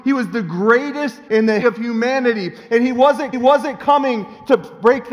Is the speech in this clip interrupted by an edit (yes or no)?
yes